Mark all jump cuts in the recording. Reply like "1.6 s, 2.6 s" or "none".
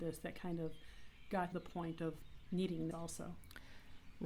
1.5 s, 2.9 s